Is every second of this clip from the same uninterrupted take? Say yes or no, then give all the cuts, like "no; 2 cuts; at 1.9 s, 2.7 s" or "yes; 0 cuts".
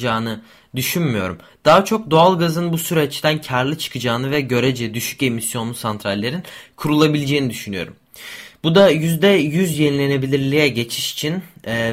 yes; 0 cuts